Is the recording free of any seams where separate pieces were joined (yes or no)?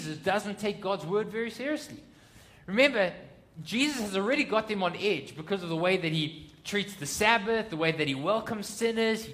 yes